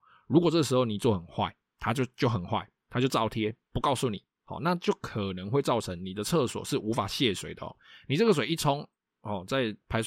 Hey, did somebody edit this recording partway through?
yes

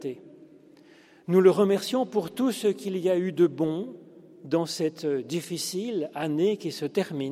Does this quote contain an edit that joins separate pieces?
no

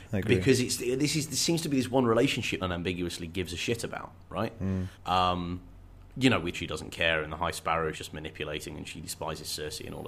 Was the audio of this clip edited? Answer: yes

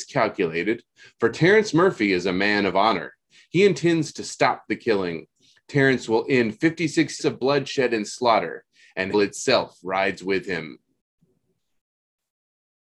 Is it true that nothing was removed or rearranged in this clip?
no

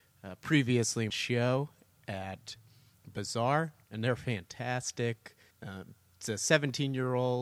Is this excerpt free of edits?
no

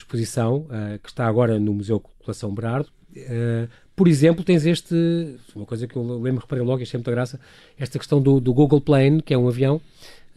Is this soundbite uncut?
yes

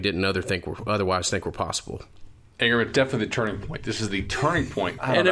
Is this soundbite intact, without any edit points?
yes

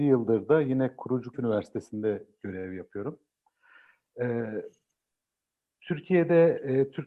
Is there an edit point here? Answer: yes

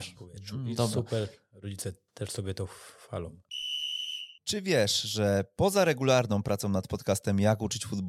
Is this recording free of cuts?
yes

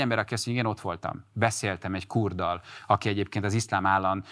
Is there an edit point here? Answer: no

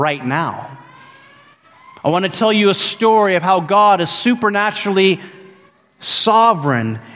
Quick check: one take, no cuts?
yes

